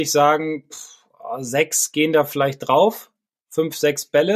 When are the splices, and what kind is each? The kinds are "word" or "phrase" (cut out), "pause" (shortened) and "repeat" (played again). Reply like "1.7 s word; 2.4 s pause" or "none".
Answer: none